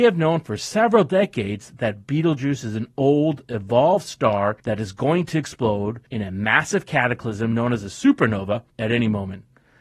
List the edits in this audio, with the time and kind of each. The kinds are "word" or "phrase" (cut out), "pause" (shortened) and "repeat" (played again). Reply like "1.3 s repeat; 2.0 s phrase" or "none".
4.6 s pause; 6.1 s pause